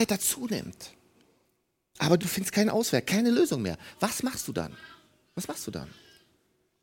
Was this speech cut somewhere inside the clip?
yes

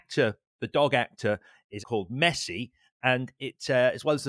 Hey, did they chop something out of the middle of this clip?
yes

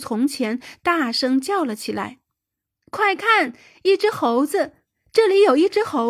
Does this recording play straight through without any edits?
yes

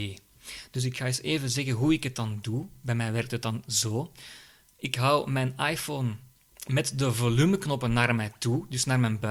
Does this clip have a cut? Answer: no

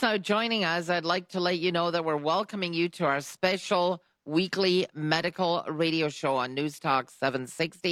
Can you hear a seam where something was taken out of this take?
no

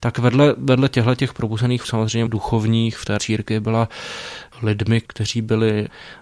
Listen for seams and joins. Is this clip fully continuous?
no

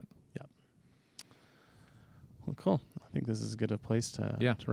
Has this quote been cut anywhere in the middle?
yes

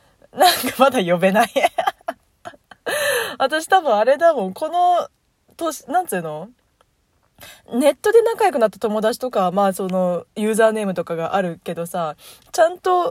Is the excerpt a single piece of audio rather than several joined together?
yes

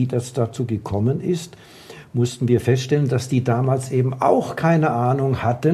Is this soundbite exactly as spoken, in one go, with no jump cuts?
yes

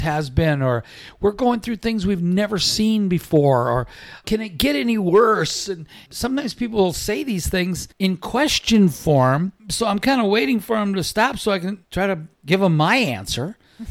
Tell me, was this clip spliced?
yes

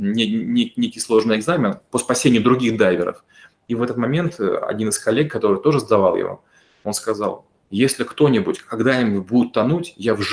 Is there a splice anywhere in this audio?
no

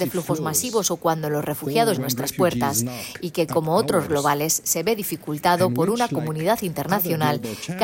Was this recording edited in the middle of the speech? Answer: yes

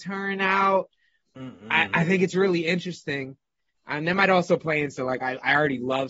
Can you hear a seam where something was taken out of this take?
no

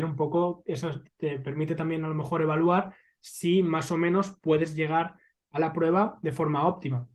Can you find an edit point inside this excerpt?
no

